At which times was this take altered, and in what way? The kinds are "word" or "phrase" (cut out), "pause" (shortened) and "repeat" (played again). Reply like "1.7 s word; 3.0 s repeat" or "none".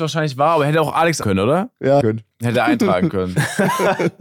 1.2 s word; 2.0 s phrase